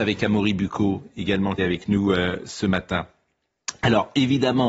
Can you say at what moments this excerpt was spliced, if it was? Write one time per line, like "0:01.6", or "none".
0:01.6